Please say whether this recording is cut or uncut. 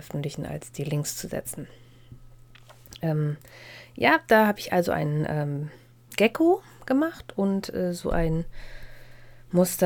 uncut